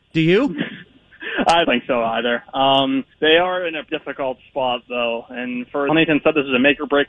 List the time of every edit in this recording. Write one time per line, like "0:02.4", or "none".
0:01.6
0:03.1
0:03.9
0:05.9